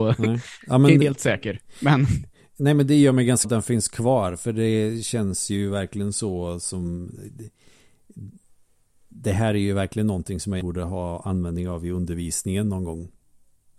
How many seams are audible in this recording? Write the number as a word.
three